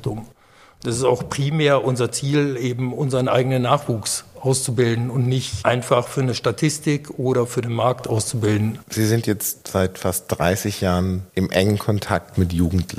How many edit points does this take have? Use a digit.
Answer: 2